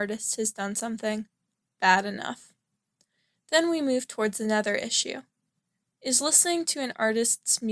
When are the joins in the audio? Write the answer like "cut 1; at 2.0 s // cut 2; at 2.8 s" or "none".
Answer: none

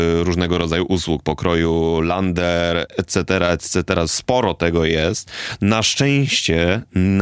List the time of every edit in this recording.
cut 1; at 2.9 s

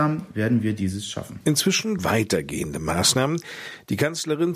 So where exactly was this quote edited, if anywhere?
cut 1; at 2.0 s

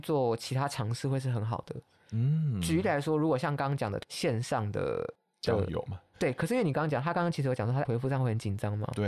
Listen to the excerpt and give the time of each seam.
cut 1; at 7.8 s

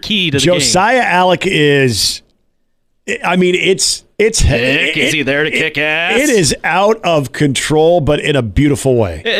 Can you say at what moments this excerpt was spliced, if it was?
cut 1; at 4.1 s

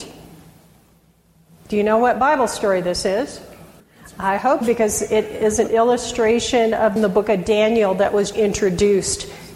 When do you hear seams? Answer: cut 1; at 3.8 s // cut 2; at 4.6 s // cut 3; at 7.0 s // cut 4; at 8.3 s

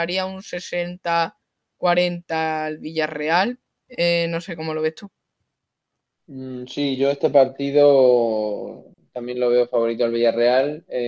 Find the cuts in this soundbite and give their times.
none

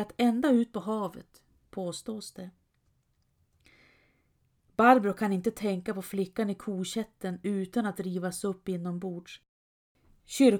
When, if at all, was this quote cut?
none

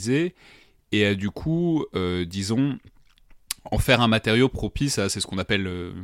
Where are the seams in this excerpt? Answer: none

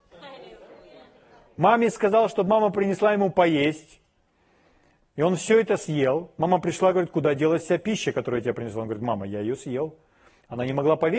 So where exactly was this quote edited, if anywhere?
none

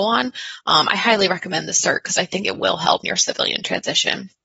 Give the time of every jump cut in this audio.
cut 1; at 3.0 s

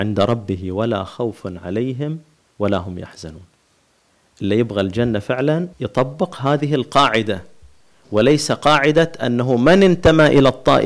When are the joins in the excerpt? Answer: cut 1; at 5.7 s

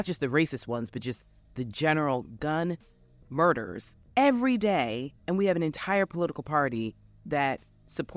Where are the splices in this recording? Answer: cut 1; at 5.2 s

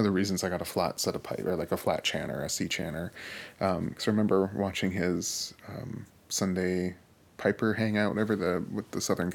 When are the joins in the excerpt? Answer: cut 1; at 6.1 s

